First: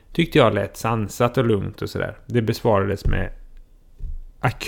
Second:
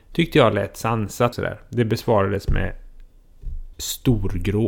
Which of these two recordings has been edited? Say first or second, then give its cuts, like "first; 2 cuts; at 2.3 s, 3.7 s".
second; 2 cuts; at 1.3 s, 3.7 s